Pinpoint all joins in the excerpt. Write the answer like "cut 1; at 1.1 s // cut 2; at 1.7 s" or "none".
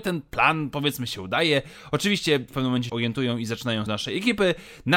cut 1; at 2.5 s // cut 2; at 2.9 s // cut 3; at 3.9 s